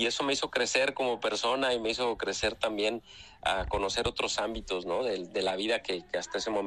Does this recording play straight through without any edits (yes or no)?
yes